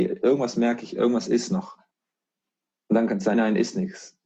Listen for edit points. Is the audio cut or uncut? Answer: cut